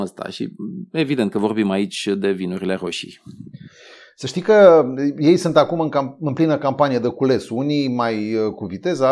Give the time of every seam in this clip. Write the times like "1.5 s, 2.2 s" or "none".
none